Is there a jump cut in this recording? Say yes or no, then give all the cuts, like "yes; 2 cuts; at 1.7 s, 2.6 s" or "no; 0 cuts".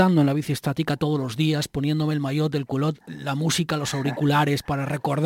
no; 0 cuts